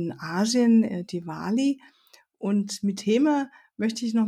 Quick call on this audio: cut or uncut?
cut